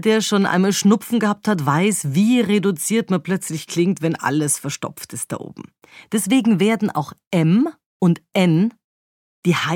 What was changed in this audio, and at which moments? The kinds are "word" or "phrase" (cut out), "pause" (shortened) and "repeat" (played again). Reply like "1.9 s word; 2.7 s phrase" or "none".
7.9 s pause